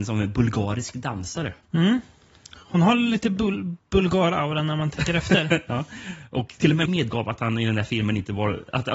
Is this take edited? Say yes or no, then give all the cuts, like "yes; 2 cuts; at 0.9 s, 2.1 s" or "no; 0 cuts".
yes; 3 cuts; at 1.6 s, 3.8 s, 6.9 s